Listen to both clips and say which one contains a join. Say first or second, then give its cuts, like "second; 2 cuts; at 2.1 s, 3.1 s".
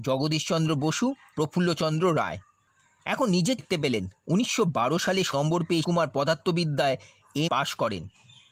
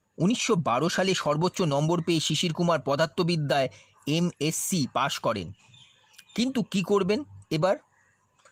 first; 7 cuts; at 1.3 s, 2.7 s, 3.6 s, 4.2 s, 5.3 s, 5.8 s, 7.5 s